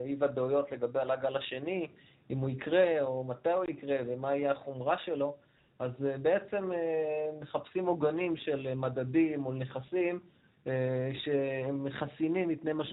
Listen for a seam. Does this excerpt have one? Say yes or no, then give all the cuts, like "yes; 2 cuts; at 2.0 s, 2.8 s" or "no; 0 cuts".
no; 0 cuts